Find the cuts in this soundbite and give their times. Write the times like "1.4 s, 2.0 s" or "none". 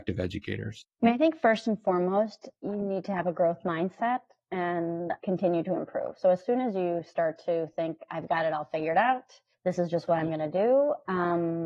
0.9 s, 2.5 s, 5.2 s, 9.5 s